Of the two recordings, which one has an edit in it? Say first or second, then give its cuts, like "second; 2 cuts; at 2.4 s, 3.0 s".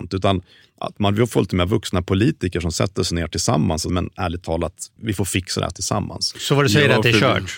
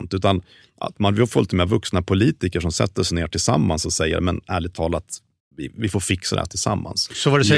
first; 2 cuts; at 3.9 s, 5.0 s